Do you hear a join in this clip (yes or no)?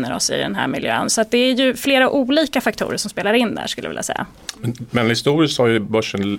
no